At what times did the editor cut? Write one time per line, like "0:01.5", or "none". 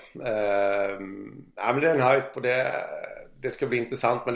0:01.5